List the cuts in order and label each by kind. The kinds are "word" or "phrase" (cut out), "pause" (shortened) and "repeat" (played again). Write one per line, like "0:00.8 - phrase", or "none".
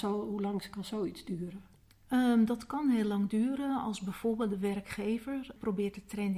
none